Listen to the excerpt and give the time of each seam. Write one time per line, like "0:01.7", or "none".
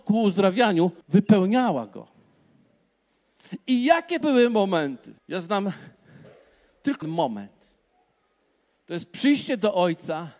0:01.0
0:04.2
0:05.2
0:07.0